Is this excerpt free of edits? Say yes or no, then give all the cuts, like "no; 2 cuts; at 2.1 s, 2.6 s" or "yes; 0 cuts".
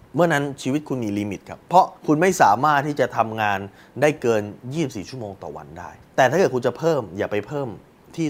no; 2 cuts; at 2.0 s, 6.0 s